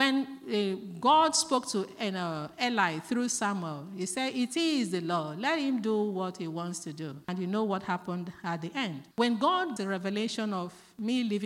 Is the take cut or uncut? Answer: cut